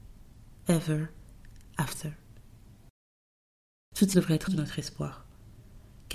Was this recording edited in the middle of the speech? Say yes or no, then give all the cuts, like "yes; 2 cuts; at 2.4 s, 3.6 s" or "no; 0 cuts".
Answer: yes; 2 cuts; at 4.1 s, 4.5 s